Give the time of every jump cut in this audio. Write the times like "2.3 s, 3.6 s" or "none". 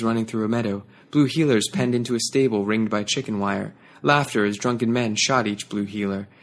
none